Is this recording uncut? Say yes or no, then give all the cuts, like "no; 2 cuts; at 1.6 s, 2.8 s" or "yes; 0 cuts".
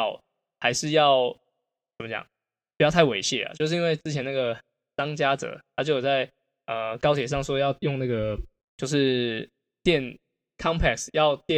no; 1 cut; at 8.6 s